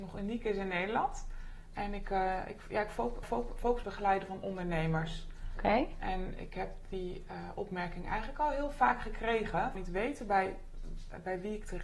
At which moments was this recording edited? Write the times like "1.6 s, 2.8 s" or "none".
3.2 s, 3.8 s, 9.7 s